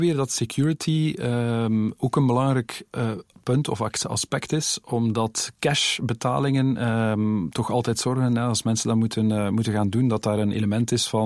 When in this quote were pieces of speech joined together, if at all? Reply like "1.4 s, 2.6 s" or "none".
none